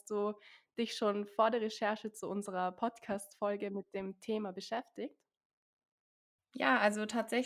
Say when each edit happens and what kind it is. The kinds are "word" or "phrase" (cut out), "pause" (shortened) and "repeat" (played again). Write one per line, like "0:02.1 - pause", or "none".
none